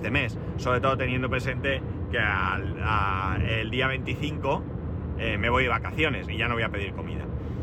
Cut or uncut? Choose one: uncut